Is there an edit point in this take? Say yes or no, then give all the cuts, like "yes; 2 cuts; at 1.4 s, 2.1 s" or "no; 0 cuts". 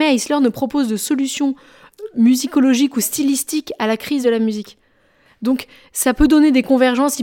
no; 0 cuts